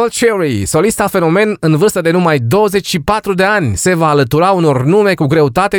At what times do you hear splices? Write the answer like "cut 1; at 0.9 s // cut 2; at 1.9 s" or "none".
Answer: none